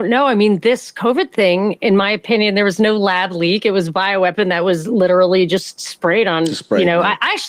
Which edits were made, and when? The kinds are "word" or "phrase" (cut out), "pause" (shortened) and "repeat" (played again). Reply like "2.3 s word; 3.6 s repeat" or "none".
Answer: none